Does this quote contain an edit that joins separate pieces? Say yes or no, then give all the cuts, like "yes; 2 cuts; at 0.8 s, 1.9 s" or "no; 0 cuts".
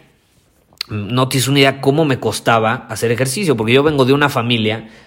no; 0 cuts